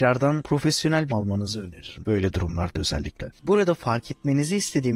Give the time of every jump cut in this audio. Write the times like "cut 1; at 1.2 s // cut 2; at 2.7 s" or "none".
cut 1; at 1.1 s